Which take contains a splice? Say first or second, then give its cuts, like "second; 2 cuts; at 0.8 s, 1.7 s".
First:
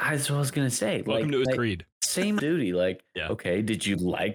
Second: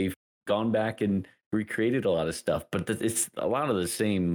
first; 3 cuts; at 1.5 s, 1.9 s, 2.4 s